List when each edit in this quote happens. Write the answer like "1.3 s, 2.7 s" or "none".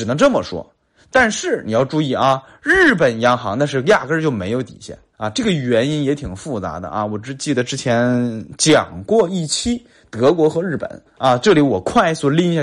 5.1 s, 11.1 s